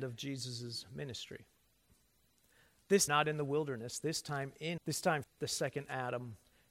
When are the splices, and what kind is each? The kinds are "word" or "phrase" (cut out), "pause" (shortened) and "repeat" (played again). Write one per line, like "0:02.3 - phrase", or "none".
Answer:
0:03.1 - word
0:04.8 - phrase
0:05.2 - word